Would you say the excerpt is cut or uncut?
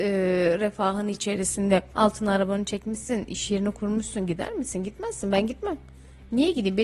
cut